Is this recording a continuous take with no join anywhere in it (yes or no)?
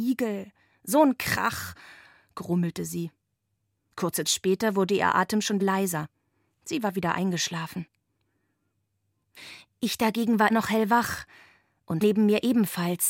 no